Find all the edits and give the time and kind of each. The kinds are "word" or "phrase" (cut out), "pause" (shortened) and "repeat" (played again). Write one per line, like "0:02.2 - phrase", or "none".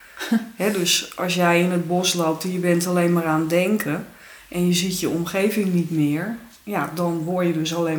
none